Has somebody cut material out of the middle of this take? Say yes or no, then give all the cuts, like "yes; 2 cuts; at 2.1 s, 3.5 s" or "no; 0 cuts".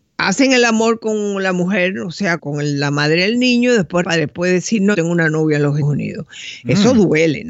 yes; 4 cuts; at 2.4 s, 4.0 s, 4.9 s, 5.8 s